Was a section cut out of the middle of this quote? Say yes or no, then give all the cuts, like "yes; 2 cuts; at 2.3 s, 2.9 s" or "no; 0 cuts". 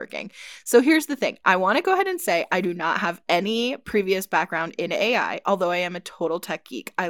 no; 0 cuts